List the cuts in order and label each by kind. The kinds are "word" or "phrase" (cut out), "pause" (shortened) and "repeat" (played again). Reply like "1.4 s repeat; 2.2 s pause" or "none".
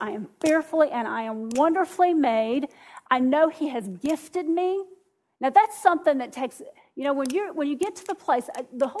none